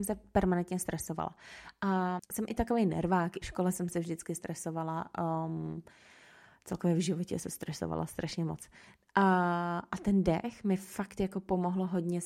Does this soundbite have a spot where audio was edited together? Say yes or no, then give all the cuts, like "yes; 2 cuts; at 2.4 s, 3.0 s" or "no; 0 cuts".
yes; 3 cuts; at 2.2 s, 3.4 s, 7.4 s